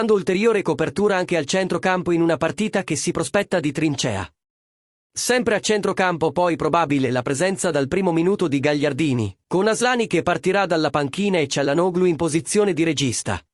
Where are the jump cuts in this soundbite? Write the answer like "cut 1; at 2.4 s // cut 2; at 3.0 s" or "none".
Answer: none